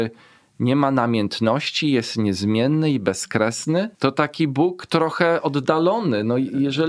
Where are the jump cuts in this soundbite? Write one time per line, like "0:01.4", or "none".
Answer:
0:03.9